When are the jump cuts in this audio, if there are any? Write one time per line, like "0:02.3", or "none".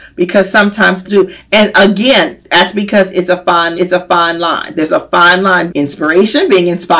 0:01.0
0:03.7
0:05.7